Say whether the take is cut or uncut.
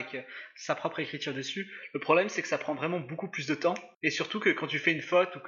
cut